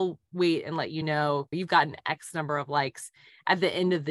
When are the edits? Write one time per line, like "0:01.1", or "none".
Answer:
none